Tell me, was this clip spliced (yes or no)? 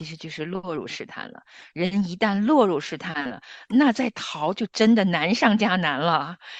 no